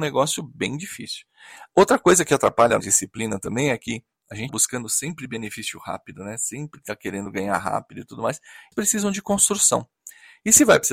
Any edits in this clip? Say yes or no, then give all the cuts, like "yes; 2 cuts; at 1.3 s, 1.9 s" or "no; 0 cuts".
yes; 3 cuts; at 2.8 s, 4.5 s, 8.7 s